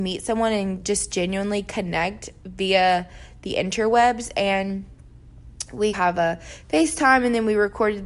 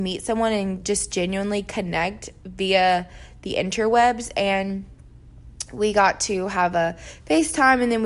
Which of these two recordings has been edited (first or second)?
first